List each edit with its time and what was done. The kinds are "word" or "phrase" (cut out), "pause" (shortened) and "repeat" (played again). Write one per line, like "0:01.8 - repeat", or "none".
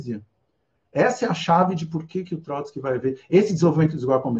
none